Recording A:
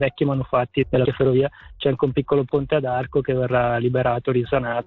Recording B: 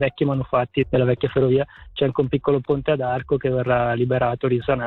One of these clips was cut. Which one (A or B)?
A